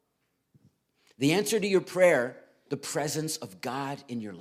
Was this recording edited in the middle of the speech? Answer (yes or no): yes